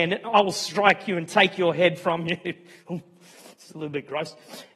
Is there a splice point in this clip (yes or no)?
no